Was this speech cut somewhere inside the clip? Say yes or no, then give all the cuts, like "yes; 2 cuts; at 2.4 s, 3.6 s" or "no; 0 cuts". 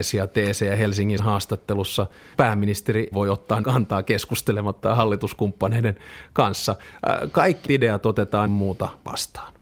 yes; 7 cuts; at 1.2 s, 2.3 s, 3.1 s, 3.6 s, 4.8 s, 7.7 s, 8.5 s